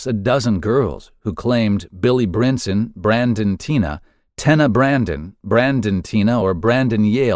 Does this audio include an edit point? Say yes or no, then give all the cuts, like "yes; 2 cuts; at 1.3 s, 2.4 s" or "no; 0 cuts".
no; 0 cuts